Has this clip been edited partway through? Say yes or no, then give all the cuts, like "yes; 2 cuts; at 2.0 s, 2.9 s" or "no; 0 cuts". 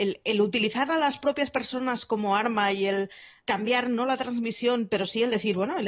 yes; 1 cut; at 3.4 s